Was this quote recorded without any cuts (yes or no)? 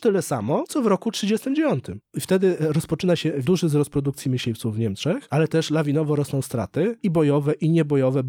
yes